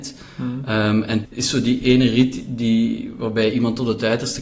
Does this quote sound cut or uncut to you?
cut